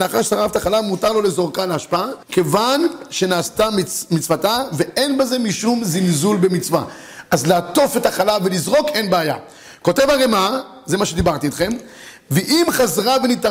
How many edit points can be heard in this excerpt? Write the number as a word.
one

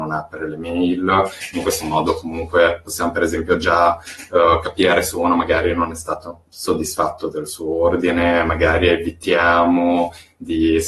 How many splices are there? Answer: zero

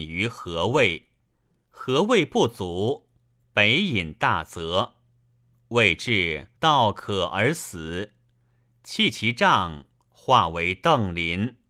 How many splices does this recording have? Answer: one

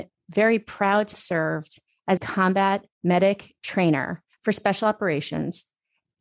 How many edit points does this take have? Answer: four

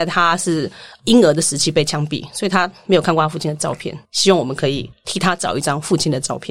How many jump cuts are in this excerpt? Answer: one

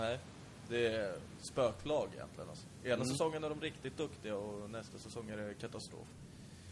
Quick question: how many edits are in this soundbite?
one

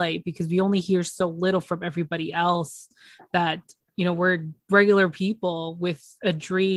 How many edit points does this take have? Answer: zero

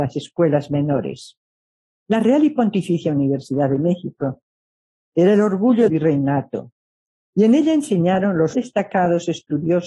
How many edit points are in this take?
two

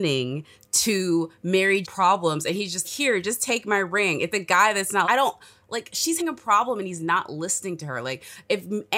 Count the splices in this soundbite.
five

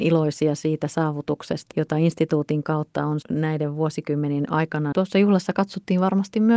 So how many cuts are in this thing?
three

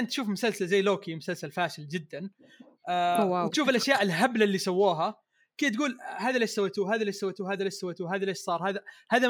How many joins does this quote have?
zero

